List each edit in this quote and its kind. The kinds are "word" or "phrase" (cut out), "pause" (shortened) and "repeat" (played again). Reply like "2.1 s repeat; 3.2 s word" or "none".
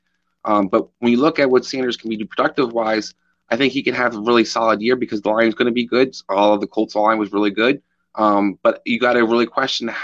none